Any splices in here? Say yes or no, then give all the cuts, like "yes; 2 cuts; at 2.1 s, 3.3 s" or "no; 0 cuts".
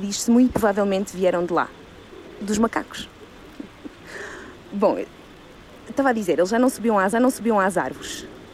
yes; 1 cut; at 7.1 s